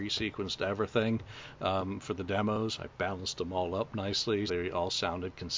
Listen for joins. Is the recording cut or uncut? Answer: cut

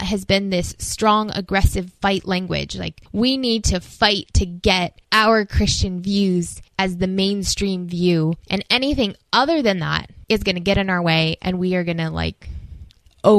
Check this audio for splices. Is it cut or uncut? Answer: cut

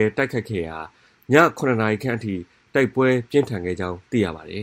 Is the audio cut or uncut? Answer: uncut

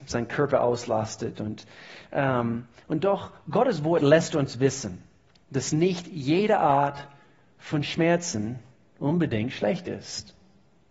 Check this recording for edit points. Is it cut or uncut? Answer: uncut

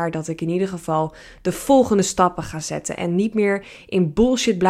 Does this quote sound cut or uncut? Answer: uncut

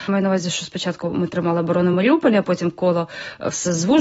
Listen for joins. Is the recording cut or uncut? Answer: uncut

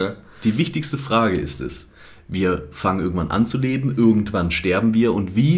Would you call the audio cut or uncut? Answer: uncut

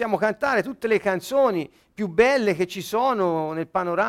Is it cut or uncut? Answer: uncut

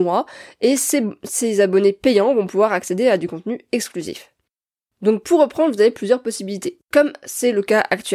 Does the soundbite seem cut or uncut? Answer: cut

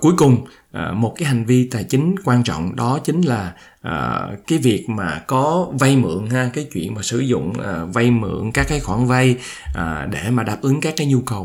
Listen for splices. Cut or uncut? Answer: uncut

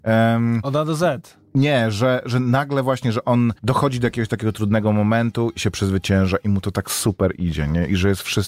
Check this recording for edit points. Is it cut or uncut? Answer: cut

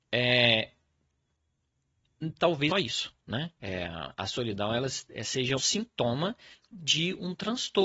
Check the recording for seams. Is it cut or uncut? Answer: cut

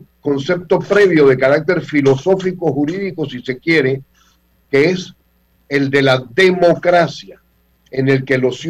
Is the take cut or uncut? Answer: uncut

